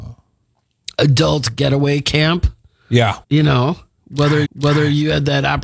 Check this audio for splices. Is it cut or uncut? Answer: cut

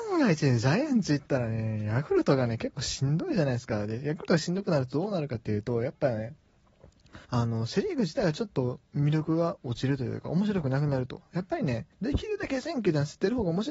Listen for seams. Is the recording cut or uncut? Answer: cut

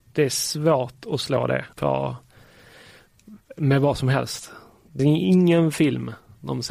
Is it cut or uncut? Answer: cut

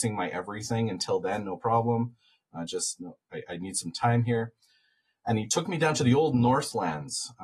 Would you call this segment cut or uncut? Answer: uncut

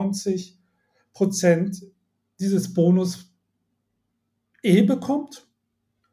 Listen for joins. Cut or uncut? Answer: uncut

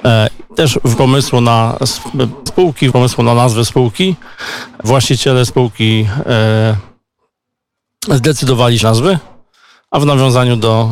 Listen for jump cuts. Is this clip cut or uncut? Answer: cut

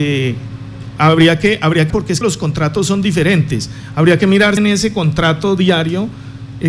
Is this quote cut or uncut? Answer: cut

